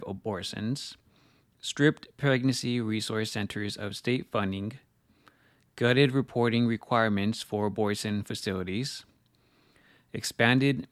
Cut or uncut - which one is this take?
uncut